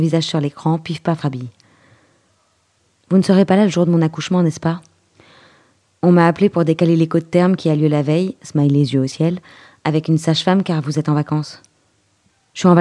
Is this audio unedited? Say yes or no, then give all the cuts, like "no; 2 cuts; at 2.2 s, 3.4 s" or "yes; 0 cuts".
no; 1 cut; at 1.2 s